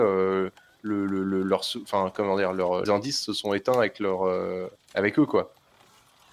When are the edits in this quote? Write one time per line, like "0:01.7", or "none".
0:02.9
0:04.8